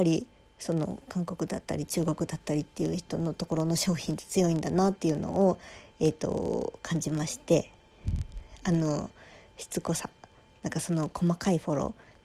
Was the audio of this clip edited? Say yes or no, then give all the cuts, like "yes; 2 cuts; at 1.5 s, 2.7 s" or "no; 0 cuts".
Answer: no; 0 cuts